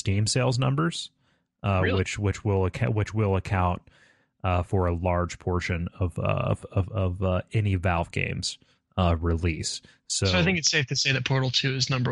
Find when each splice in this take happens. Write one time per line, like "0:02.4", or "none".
none